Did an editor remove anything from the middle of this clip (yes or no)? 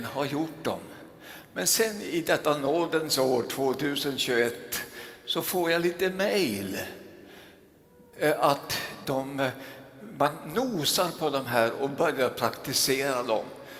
yes